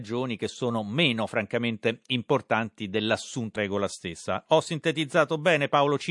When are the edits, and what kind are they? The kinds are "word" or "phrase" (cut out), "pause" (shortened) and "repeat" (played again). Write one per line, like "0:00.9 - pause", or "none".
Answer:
0:03.6 - word